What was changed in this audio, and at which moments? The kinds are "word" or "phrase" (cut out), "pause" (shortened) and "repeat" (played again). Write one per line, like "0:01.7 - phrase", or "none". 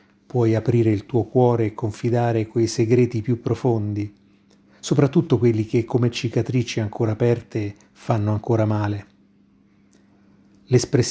none